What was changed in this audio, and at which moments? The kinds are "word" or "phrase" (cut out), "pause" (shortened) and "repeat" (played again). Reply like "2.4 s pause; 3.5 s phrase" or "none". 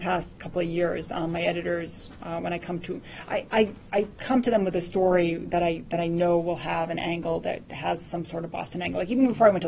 none